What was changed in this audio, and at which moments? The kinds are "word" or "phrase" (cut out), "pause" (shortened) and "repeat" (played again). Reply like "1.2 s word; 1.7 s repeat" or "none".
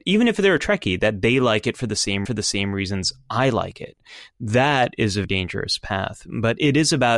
2.3 s repeat; 5.2 s word